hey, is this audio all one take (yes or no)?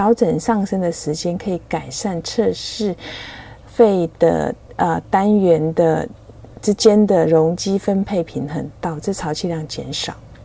no